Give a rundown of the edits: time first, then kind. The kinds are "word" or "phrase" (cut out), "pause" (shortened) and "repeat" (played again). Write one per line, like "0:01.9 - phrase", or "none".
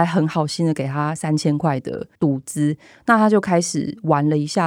0:02.2 - pause